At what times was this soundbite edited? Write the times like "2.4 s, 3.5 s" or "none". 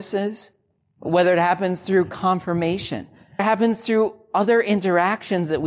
3.4 s